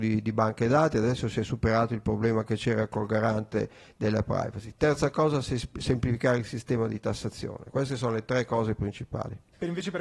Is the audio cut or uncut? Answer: uncut